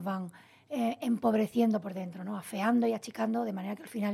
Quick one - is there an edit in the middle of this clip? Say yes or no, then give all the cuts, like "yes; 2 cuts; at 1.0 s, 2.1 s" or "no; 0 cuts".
no; 0 cuts